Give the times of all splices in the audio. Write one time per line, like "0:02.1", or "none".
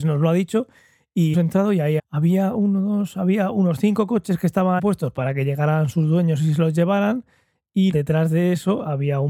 0:01.3
0:02.0
0:04.8
0:07.9